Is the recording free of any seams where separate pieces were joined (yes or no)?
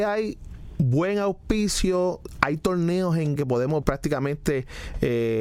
no